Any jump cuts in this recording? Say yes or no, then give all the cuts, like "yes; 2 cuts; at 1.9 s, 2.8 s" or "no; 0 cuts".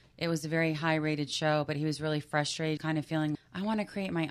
yes; 2 cuts; at 2.8 s, 3.3 s